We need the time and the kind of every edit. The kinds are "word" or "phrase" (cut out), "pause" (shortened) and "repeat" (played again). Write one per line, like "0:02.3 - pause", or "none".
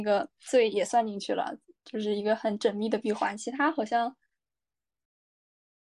none